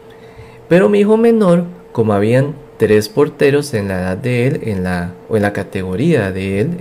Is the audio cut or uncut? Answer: uncut